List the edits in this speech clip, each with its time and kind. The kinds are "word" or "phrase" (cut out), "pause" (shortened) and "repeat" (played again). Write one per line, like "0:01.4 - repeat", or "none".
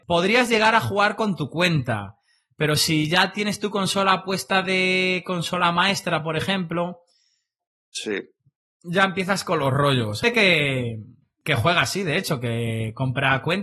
none